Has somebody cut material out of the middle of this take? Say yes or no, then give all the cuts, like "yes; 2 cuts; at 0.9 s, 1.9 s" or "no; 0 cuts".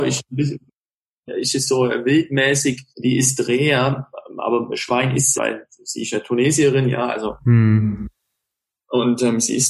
yes; 2 cuts; at 2.9 s, 5.4 s